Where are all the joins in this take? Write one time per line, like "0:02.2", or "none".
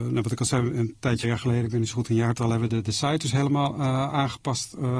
0:01.2
0:02.7